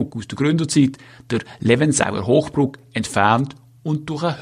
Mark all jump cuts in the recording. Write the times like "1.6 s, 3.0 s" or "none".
none